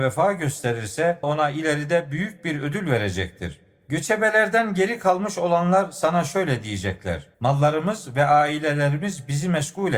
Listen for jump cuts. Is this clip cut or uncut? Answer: cut